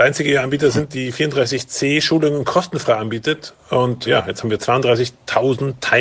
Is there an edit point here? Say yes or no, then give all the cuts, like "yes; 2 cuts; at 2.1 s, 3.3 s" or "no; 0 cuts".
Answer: no; 0 cuts